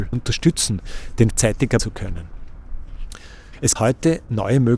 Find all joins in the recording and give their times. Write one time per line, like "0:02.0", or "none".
0:01.3
0:01.8
0:03.8